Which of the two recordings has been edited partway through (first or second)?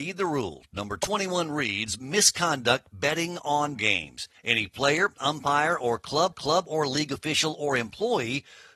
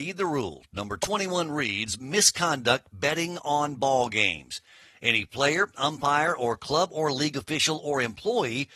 first